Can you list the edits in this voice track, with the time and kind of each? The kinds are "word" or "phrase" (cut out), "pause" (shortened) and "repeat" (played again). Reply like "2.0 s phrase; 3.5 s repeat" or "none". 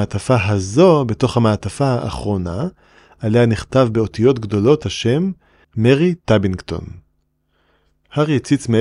none

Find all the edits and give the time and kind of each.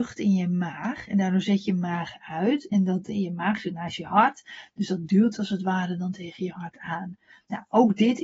none

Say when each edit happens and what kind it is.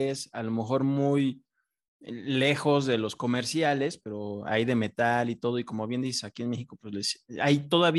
none

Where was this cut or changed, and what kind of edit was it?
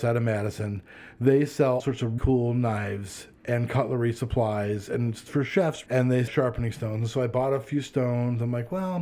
1.8 s word; 2.2 s word; 5.9 s word; 6.3 s phrase

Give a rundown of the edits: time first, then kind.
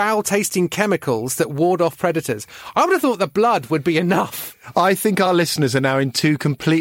none

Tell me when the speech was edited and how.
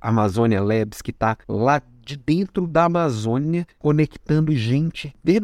1.4 s pause; 3.7 s pause

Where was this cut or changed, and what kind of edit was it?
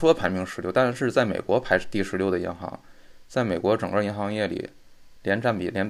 none

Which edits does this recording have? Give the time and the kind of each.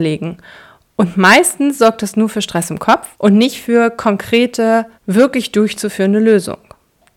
3.1 s pause; 5.0 s pause

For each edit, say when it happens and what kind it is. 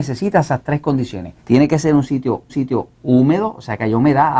1.4 s pause; 2.5 s repeat

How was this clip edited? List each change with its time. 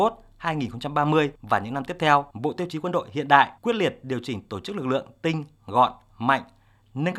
1.3 s pause; 2.3 s pause; 3.6 s pause

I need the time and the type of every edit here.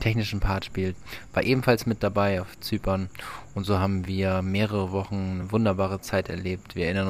none

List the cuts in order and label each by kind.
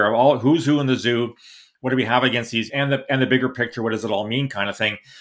2.7 s word

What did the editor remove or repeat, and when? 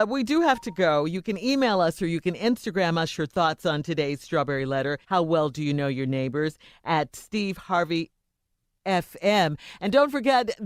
5.0 s pause

